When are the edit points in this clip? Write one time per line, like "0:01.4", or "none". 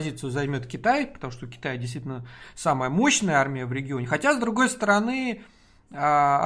none